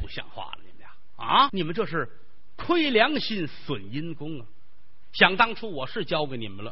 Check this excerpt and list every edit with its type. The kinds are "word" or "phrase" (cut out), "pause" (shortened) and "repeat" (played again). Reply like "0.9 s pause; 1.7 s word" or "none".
1.5 s word